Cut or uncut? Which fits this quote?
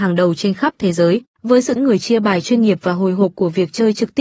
cut